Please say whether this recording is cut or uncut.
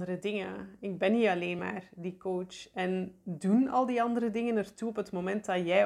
uncut